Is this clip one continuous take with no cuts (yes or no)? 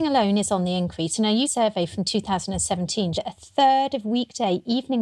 no